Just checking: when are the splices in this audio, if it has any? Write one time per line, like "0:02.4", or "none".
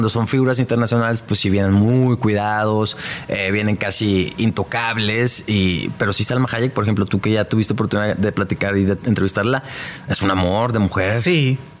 none